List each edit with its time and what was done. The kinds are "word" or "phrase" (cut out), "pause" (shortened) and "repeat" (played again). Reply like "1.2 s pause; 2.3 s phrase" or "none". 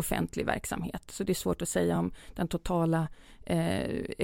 none